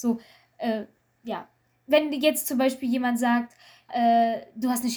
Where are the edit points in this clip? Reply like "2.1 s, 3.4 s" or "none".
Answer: 3.9 s